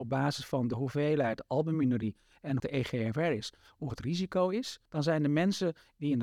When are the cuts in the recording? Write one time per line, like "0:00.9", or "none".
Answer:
0:02.6
0:03.9